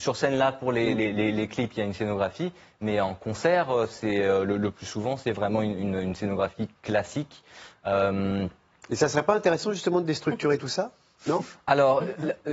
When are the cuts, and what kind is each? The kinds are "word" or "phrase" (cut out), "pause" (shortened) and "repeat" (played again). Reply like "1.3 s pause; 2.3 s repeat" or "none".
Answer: none